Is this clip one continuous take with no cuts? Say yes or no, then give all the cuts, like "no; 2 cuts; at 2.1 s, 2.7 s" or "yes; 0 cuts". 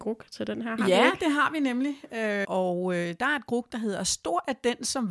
no; 1 cut; at 2.4 s